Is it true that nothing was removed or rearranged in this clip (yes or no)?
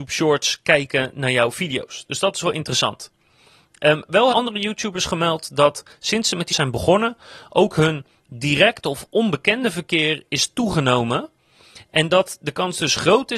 no